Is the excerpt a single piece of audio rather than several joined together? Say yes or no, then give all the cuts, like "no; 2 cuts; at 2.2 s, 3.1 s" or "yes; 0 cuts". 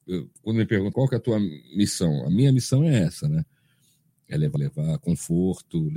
no; 2 cuts; at 0.9 s, 4.6 s